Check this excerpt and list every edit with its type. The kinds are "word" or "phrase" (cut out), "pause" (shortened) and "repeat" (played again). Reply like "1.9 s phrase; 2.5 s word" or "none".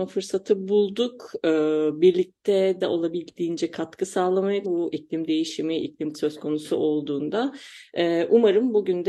2.8 s word; 4.6 s word; 6.1 s word